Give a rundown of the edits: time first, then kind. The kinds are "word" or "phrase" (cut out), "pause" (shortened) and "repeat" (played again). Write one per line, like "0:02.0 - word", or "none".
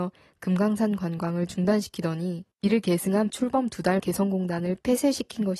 0:02.5 - pause
0:03.3 - phrase
0:04.0 - word